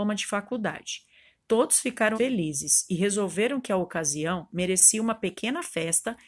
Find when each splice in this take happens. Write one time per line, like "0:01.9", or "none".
0:02.1